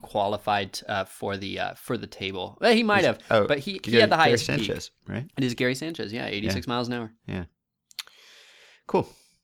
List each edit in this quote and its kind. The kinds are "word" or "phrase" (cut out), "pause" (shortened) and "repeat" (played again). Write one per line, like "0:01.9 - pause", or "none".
0:05.0 - pause
0:07.2 - pause